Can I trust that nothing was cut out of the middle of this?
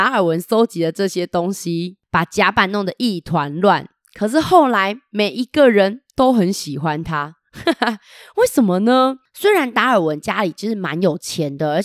yes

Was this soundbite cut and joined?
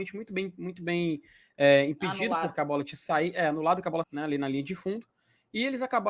yes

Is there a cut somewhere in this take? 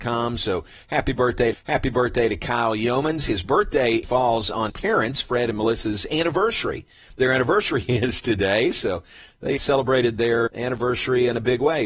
yes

